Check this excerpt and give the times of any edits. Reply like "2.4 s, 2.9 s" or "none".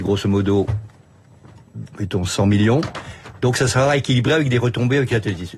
none